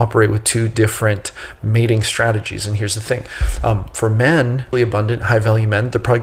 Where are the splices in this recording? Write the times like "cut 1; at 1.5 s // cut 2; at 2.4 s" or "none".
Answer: cut 1; at 4.7 s